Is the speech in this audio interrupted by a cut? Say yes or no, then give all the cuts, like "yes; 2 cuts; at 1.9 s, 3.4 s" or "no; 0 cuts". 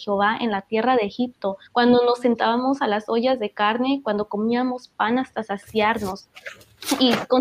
yes; 1 cut; at 1.7 s